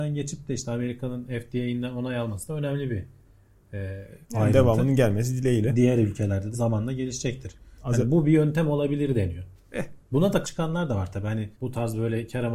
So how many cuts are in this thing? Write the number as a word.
five